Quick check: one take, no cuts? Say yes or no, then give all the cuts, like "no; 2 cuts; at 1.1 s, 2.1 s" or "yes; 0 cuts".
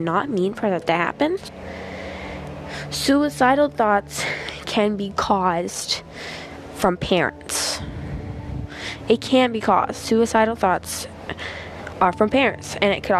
yes; 0 cuts